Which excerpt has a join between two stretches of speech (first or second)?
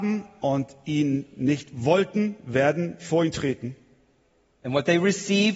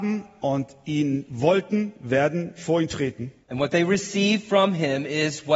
second